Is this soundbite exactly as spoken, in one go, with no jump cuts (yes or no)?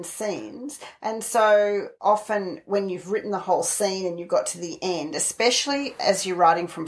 no